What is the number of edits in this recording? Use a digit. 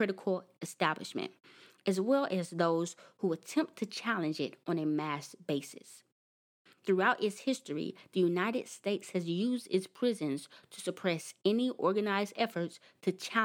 0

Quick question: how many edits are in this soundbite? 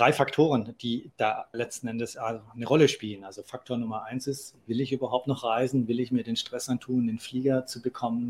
1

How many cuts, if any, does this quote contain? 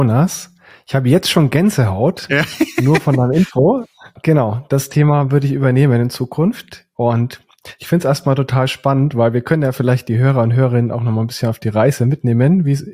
0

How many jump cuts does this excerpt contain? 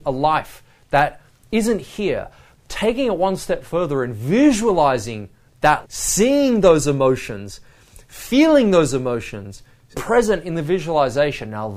3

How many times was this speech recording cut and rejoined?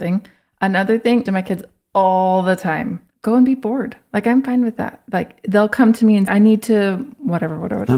3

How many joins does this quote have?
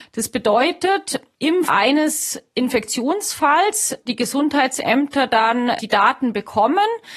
3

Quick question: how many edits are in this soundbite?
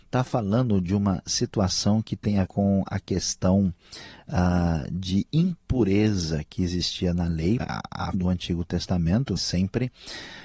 4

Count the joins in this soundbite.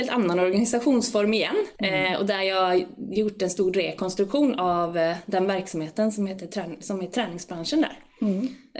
1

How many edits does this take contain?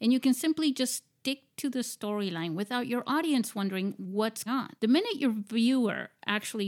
2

